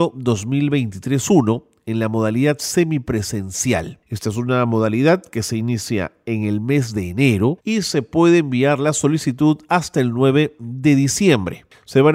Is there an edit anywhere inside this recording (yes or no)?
yes